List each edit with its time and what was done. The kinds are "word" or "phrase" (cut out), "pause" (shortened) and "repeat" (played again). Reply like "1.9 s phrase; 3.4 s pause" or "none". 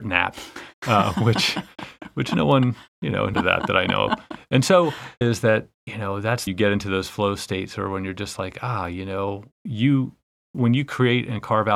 3.3 s phrase; 5.2 s phrase; 5.7 s pause; 6.5 s phrase

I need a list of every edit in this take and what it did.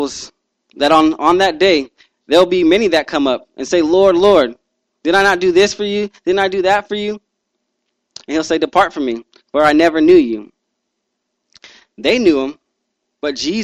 none

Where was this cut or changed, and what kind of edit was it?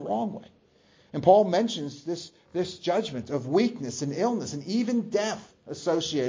none

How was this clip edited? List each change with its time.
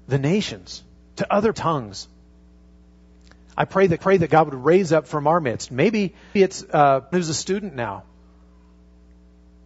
1.5 s phrase; 4.0 s repeat; 6.4 s word; 7.1 s word

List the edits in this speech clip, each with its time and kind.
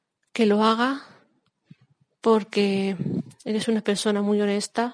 none

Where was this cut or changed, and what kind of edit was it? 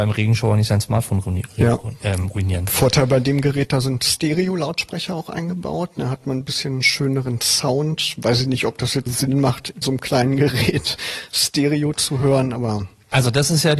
9.1 s word; 9.8 s word

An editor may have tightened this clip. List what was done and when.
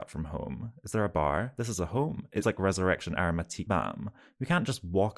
2.4 s word; 3.7 s word

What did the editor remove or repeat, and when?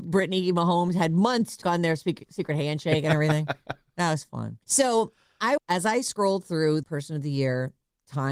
1.6 s word; 4.6 s pause; 5.6 s phrase; 6.8 s word

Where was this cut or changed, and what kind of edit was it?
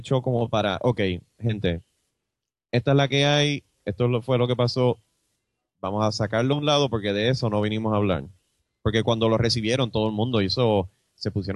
none

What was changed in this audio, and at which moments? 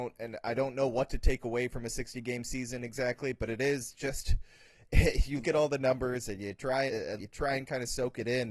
5.4 s word; 6.9 s word; 7.2 s word

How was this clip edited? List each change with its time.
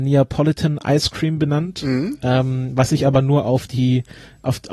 none

